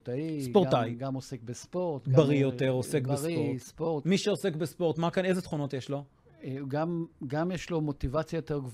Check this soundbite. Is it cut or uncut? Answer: uncut